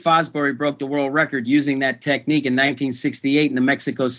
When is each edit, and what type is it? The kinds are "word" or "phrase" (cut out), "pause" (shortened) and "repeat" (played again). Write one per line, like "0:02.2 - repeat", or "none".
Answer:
none